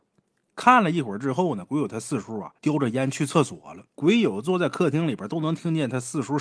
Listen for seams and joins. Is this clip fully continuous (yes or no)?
no